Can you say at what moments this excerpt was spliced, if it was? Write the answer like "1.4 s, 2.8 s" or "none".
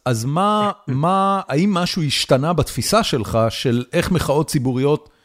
none